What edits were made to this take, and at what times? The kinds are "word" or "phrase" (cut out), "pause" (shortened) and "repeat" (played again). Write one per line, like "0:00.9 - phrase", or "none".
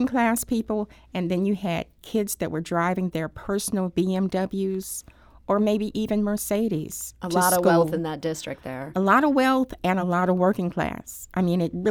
none